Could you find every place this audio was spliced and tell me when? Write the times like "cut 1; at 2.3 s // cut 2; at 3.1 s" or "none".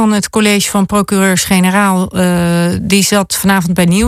none